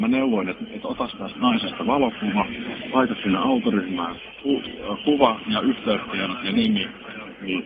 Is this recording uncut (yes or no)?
yes